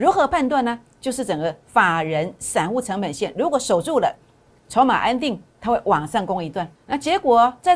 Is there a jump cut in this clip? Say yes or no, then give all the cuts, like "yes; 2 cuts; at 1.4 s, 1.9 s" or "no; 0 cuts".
yes; 2 cuts; at 5.5 s, 6.8 s